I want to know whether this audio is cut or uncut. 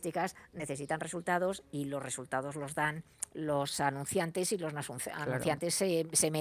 uncut